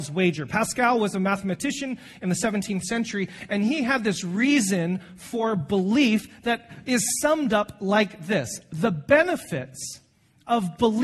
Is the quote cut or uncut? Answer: uncut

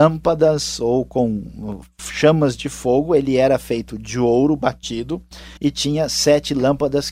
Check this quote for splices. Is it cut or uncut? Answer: cut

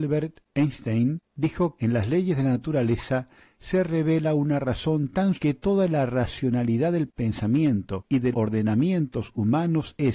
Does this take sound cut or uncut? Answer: cut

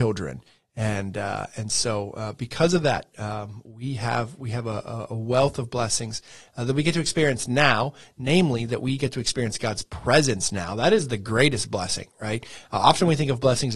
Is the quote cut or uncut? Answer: uncut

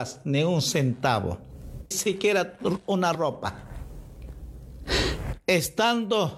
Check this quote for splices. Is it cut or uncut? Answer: cut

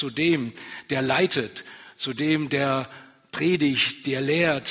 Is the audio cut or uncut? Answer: uncut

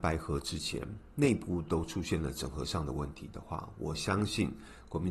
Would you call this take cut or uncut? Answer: cut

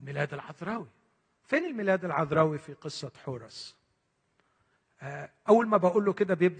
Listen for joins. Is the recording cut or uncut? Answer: uncut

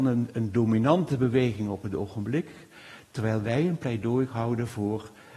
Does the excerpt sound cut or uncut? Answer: uncut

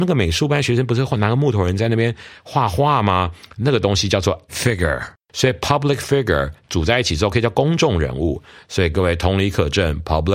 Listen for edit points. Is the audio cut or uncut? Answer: uncut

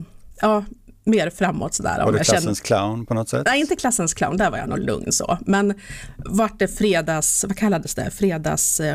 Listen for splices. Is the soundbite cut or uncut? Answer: uncut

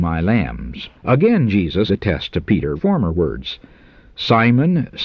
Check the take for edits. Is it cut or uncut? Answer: cut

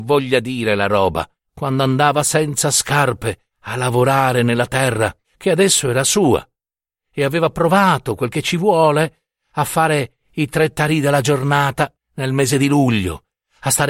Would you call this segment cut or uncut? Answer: cut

